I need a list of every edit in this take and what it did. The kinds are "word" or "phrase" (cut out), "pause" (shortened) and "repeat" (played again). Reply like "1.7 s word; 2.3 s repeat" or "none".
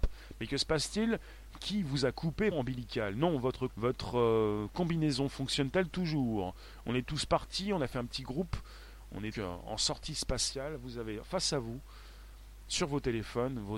2.5 s phrase; 3.7 s word; 9.3 s word